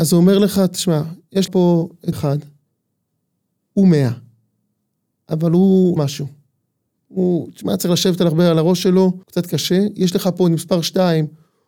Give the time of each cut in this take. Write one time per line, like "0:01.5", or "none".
0:01.5
0:02.1
0:06.0
0:09.2